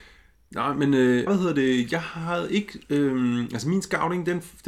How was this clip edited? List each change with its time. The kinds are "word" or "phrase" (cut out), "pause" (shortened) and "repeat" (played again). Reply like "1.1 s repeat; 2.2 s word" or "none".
1.3 s phrase